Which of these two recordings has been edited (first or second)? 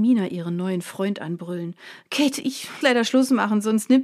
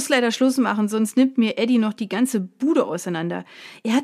first